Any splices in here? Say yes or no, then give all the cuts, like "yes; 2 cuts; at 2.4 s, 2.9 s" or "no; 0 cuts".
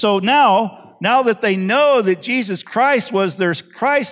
no; 0 cuts